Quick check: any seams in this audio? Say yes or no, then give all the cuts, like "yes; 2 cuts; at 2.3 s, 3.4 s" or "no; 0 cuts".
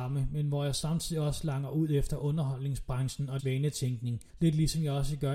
yes; 2 cuts; at 3.4 s, 4.3 s